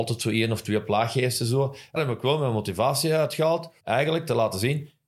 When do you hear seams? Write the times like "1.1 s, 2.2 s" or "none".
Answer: 2.0 s, 3.8 s